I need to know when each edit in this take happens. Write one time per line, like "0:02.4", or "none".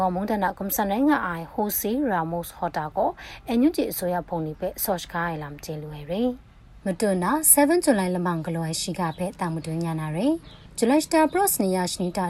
0:06.8